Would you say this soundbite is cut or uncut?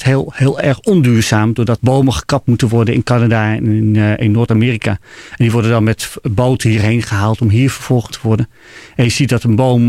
cut